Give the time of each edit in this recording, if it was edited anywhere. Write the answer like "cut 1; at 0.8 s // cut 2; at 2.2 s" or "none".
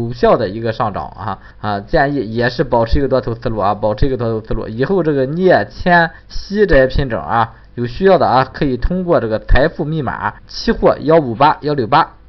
cut 1; at 1.5 s // cut 2; at 6.2 s // cut 3; at 10.4 s